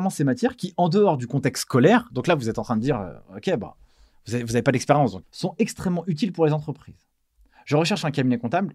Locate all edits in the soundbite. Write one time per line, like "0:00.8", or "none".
0:05.2

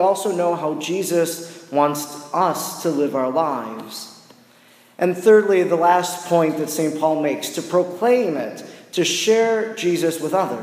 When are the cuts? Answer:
none

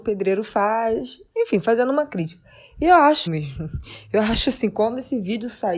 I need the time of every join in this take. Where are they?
0:03.3

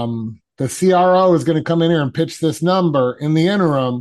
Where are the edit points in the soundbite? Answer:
none

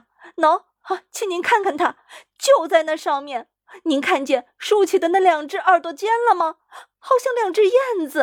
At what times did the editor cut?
none

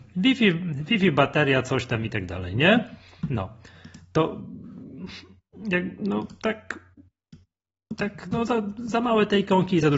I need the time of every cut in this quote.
none

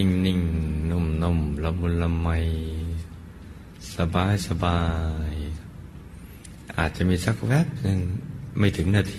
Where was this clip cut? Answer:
none

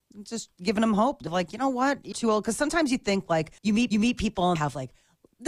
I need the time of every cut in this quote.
0:01.3
0:02.1
0:03.6
0:03.9
0:04.6

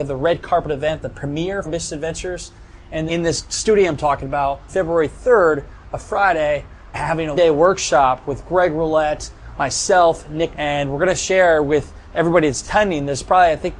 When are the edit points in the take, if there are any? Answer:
0:01.6
0:03.1
0:04.7
0:06.9
0:07.3
0:10.5

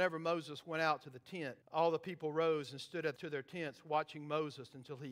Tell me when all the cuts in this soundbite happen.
0:01.6
0:03.2

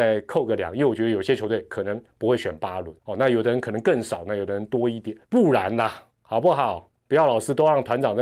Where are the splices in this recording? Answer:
0:02.1
0:03.0
0:05.2
0:06.1

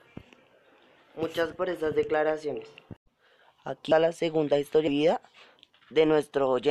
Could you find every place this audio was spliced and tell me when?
0:01.5
0:03.9
0:04.9

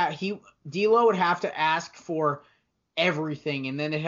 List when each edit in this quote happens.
none

